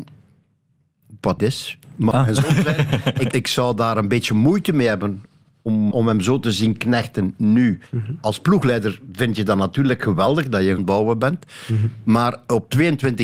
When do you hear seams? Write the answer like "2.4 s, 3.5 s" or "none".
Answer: 1.4 s, 2.1 s, 3.3 s, 5.9 s, 7.9 s, 10.8 s